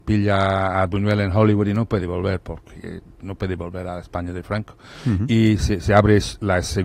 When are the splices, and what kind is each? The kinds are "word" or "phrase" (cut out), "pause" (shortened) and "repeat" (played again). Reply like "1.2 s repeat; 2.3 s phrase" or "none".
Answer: none

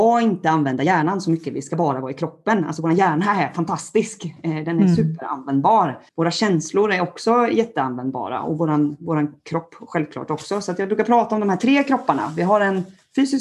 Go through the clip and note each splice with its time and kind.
6.1 s pause

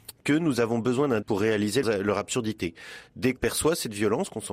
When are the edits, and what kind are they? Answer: 1.2 s word; 1.8 s word; 3.4 s word

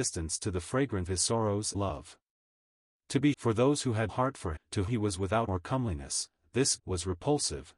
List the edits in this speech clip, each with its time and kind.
1.1 s word; 1.7 s word; 3.3 s word; 4.1 s word; 4.6 s word; 4.9 s word; 5.5 s word; 6.8 s word

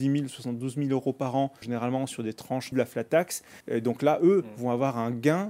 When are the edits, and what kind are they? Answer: 1.6 s word; 2.7 s phrase; 3.6 s pause

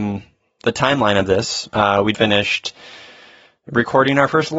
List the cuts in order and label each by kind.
2.1 s word

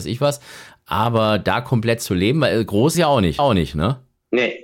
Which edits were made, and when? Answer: 2.9 s phrase; 3.4 s repeat

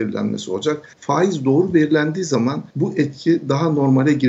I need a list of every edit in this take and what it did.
0.9 s pause; 2.7 s pause

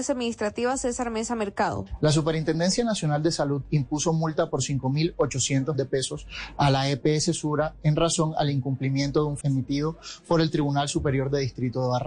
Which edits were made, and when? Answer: 5.7 s word; 9.4 s phrase

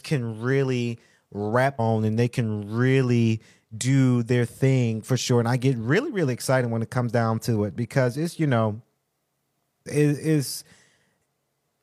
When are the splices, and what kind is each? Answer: 1.8 s word; 8.3 s word; 9.9 s word

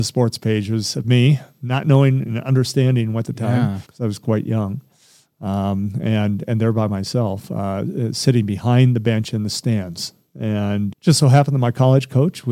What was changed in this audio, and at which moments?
1.0 s phrase; 3.2 s phrase; 3.8 s pause; 10.9 s word

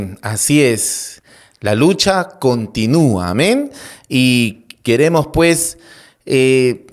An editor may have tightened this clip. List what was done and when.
none

